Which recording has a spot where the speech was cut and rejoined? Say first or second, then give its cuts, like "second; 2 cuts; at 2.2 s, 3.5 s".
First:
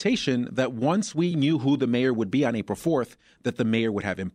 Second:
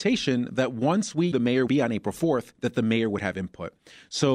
second; 3 cuts; at 1.3 s, 1.7 s, 2.5 s